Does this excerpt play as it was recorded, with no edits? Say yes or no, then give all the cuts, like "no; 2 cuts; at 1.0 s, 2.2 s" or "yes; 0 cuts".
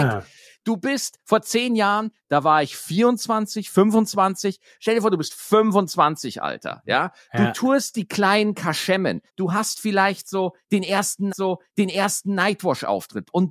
no; 2 cuts; at 9.3 s, 11.3 s